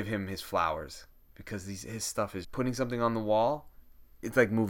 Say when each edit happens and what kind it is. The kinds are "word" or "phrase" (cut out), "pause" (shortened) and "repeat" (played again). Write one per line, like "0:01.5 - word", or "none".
0:02.4 - word